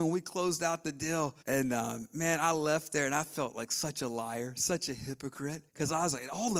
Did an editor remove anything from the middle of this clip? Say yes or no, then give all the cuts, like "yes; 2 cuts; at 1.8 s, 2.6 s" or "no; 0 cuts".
yes; 2 cuts; at 1.4 s, 5.7 s